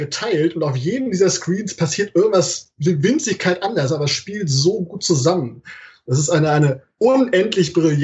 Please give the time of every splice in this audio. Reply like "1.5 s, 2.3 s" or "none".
none